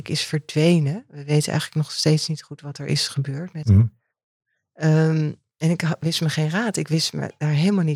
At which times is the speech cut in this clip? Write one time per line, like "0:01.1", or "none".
none